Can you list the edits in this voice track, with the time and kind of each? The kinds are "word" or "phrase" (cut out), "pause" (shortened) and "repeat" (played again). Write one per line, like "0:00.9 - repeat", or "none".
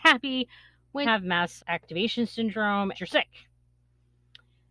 0:01.0 - word
0:01.6 - word
0:02.9 - word